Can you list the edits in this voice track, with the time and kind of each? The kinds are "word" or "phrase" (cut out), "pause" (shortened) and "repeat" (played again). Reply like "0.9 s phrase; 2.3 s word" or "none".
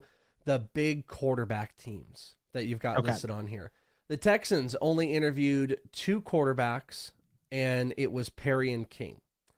none